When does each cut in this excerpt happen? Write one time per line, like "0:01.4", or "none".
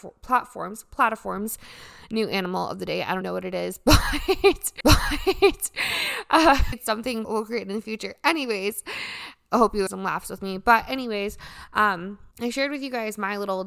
0:03.2
0:04.8
0:06.7
0:07.2
0:09.9
0:12.3